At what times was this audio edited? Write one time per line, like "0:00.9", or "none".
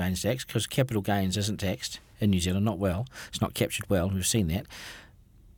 none